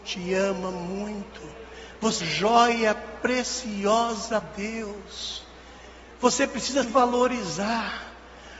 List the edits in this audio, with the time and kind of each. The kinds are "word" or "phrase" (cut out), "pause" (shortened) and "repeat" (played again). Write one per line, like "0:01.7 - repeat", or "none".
0:02.2 - word
0:04.4 - word
0:06.8 - word